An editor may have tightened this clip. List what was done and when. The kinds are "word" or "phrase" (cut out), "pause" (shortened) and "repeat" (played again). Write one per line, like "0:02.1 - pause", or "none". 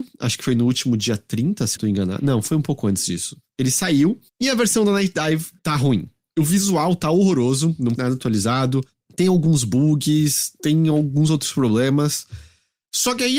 0:01.8 - phrase
0:04.3 - pause
0:05.6 - pause
0:08.0 - word